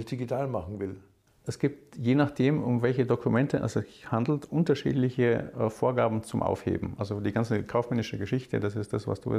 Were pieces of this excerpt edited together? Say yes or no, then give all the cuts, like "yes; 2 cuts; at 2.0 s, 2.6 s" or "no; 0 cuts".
no; 0 cuts